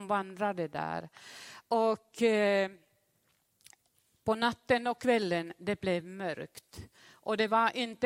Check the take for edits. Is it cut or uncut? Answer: uncut